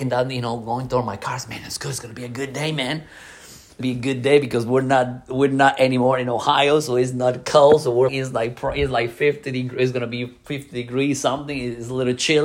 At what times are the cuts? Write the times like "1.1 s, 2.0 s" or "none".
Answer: 3.8 s, 8.1 s